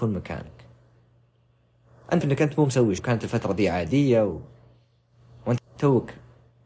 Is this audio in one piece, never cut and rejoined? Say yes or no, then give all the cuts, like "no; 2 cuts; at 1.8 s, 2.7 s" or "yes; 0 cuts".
no; 3 cuts; at 2.2 s, 3.0 s, 5.6 s